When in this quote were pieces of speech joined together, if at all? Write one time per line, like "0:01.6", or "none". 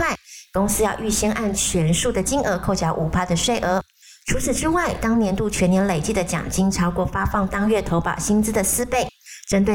none